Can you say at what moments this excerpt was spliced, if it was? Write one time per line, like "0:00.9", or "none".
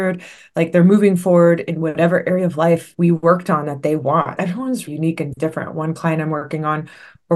0:02.9
0:04.4
0:04.9